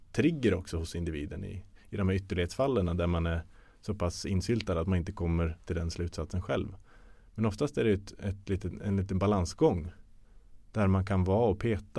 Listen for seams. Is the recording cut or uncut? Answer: uncut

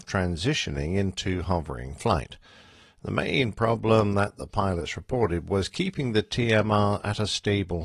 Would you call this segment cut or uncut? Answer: uncut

